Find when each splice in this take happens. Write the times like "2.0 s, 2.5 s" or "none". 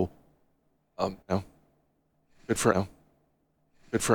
1.2 s, 2.7 s